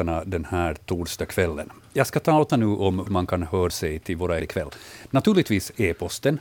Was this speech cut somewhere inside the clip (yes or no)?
yes